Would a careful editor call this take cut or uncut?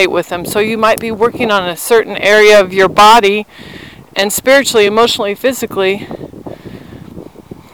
uncut